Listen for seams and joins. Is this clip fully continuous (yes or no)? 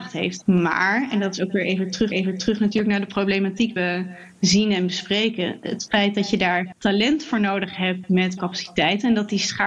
no